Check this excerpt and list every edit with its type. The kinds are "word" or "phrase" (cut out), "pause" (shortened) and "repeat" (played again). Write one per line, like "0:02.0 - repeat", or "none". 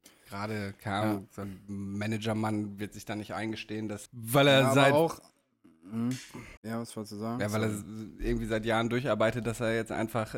0:04.1 - phrase
0:06.6 - pause